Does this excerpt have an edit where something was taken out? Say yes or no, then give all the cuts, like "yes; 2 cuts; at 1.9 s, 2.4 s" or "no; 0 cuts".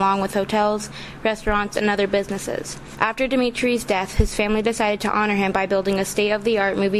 no; 0 cuts